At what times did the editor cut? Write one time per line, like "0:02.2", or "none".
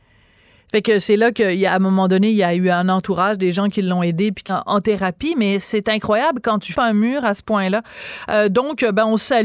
0:04.5
0:06.7